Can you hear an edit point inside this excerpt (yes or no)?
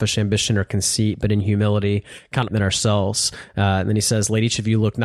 yes